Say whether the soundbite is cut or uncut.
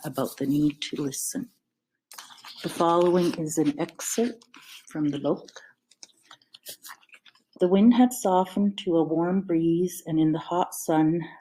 uncut